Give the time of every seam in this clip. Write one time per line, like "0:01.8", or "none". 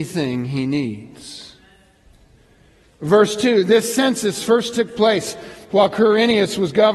none